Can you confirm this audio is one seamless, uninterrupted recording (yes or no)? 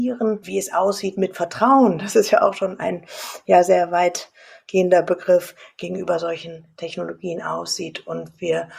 yes